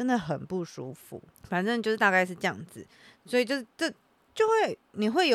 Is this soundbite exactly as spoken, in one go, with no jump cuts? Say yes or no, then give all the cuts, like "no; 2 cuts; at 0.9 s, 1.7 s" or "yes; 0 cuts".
yes; 0 cuts